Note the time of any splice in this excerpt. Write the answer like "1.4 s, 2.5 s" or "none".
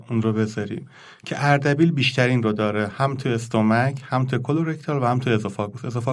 none